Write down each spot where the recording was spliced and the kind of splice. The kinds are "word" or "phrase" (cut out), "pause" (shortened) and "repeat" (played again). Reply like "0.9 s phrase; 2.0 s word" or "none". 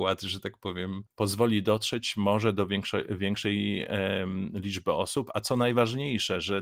1.1 s pause